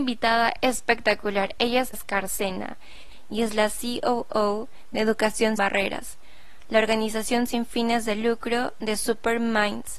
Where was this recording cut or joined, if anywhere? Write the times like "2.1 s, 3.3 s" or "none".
1.9 s, 5.6 s

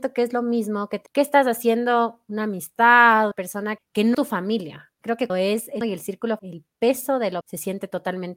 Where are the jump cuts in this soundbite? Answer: 1.1 s, 3.3 s, 3.8 s, 4.1 s, 5.3 s, 5.8 s, 6.4 s, 7.4 s

